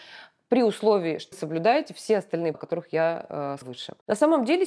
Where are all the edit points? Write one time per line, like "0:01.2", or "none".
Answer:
0:01.3
0:02.5
0:03.6

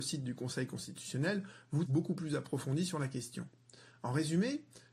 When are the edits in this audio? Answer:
0:01.9

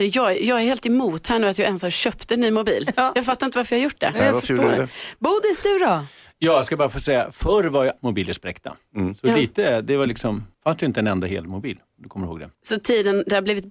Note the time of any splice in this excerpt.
0:08.0
0:10.5
0:12.5

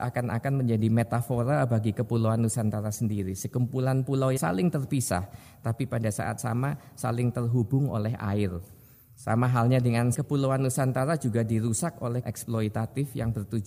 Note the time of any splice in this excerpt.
0:04.4
0:06.4
0:10.1
0:12.2

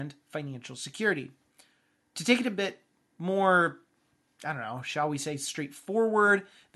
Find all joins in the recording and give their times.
none

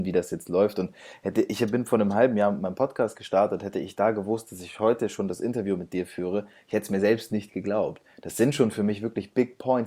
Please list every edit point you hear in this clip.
none

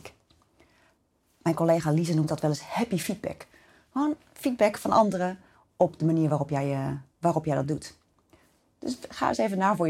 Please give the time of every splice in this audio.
none

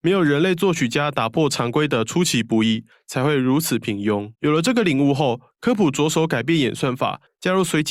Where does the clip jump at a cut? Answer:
0:04.3

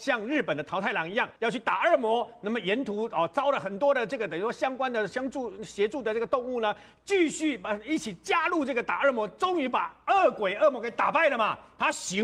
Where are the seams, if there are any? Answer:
0:01.4

